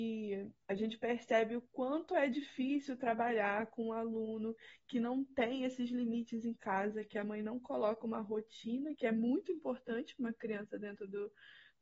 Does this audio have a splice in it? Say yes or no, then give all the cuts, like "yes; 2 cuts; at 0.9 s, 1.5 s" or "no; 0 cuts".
no; 0 cuts